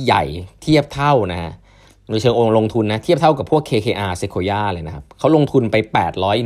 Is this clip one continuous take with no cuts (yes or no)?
yes